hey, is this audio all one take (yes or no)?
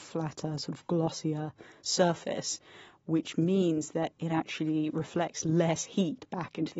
yes